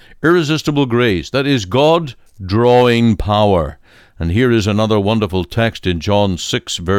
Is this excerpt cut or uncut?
uncut